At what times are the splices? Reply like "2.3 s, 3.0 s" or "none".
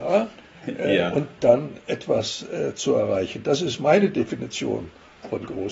1.4 s